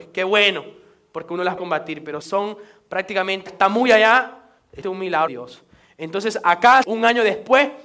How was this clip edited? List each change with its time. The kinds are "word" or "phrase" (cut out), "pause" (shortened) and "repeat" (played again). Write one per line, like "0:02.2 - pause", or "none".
0:01.6 - word
0:02.2 - word
0:03.5 - word
0:04.8 - word
0:05.3 - word
0:06.8 - word